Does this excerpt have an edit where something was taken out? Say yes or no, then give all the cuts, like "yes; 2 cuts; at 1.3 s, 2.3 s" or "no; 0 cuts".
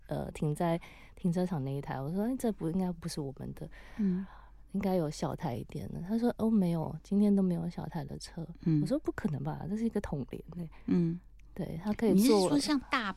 no; 0 cuts